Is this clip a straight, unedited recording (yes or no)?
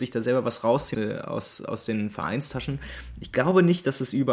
no